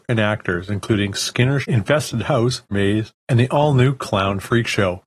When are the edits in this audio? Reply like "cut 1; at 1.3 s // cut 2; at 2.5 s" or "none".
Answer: cut 1; at 1.6 s // cut 2; at 2.7 s